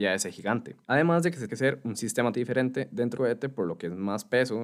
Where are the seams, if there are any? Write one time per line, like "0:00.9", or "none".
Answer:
0:01.5
0:02.3
0:03.2